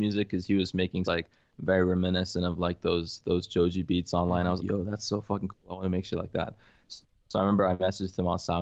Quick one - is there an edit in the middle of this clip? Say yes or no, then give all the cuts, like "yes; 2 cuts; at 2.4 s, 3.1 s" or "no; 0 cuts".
yes; 2 cuts; at 1.0 s, 4.6 s